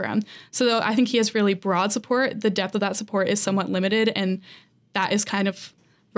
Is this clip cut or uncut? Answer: uncut